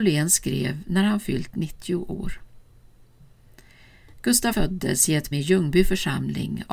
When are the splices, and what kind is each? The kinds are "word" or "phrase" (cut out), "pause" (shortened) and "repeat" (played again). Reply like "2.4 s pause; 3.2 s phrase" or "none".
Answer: 4.5 s word; 5.3 s word